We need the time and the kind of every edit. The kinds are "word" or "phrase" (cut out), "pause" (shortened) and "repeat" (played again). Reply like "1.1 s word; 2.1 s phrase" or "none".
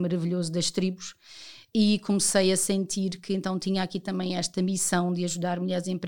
none